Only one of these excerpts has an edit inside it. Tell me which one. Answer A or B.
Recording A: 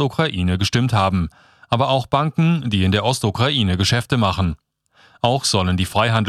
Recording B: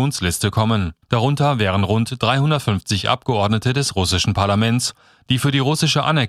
B